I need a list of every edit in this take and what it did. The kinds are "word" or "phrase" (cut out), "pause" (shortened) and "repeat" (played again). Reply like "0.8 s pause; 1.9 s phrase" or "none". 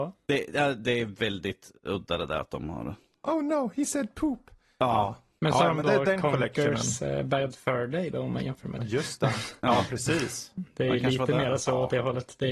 none